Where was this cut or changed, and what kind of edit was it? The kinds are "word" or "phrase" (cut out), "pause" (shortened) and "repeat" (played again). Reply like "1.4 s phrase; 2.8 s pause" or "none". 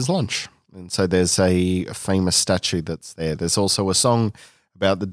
none